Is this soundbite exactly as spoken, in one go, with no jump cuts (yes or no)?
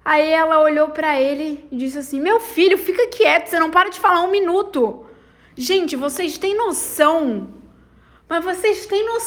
yes